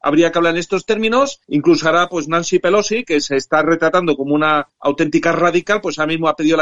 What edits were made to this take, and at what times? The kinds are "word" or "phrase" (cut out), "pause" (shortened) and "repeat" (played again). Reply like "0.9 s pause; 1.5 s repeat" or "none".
1.4 s pause; 4.7 s pause